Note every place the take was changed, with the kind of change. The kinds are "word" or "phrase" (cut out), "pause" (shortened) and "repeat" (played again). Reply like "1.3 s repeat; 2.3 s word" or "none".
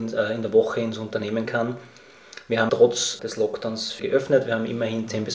1.5 s word; 2.7 s word; 3.2 s word; 4.0 s word